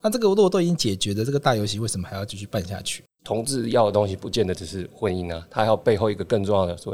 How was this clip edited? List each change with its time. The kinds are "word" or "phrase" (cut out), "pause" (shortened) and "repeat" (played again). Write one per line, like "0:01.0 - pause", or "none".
none